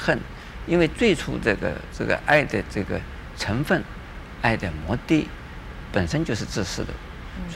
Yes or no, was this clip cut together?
no